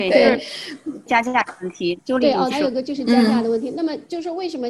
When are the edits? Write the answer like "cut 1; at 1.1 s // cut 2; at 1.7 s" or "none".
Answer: cut 1; at 1.1 s // cut 2; at 2.5 s

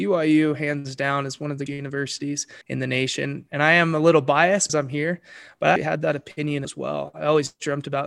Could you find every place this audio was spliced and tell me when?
cut 1; at 1.7 s // cut 2; at 2.6 s // cut 3; at 4.7 s // cut 4; at 5.8 s // cut 5; at 6.6 s

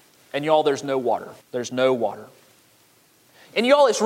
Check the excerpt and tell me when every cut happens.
cut 1; at 1.4 s

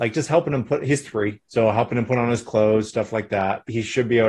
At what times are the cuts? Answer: cut 1; at 1.4 s

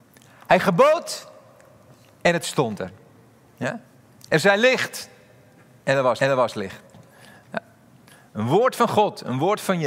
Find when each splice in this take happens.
cut 1; at 6.2 s

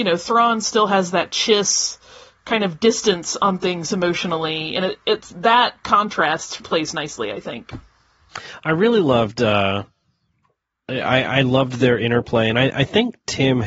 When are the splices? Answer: cut 1; at 6.6 s

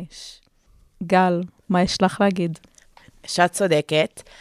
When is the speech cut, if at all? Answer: none

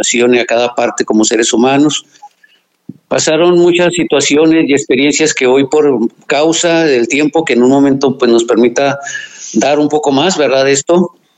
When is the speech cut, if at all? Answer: none

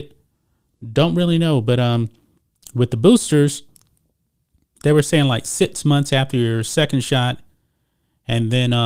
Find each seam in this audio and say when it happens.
none

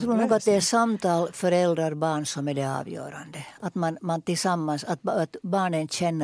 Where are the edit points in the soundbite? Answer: none

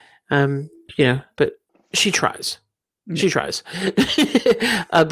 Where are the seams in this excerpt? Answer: none

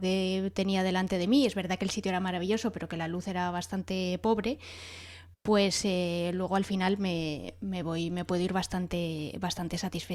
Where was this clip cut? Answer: none

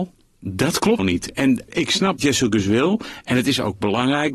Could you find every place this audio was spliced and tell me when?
cut 1; at 1.0 s // cut 2; at 1.7 s // cut 3; at 2.2 s

